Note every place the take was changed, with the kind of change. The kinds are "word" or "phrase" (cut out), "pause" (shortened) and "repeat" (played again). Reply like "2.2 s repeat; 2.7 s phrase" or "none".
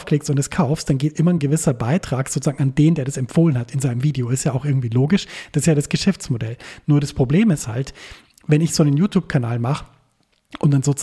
none